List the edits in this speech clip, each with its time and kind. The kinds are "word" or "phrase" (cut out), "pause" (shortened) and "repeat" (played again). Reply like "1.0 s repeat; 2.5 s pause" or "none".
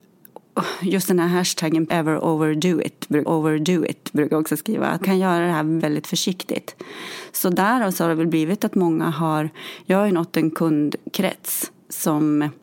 1.9 s phrase; 3.2 s repeat; 5.0 s word; 5.8 s word